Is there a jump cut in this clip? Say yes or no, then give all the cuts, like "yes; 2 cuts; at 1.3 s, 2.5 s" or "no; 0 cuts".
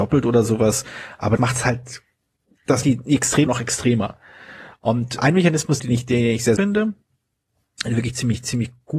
yes; 6 cuts; at 1.4 s, 2.8 s, 3.5 s, 5.2 s, 5.8 s, 6.6 s